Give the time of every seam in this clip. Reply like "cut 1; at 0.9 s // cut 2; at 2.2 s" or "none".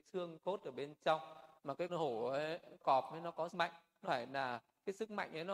cut 1; at 1.6 s // cut 2; at 1.9 s // cut 3; at 2.8 s // cut 4; at 3.5 s // cut 5; at 4.0 s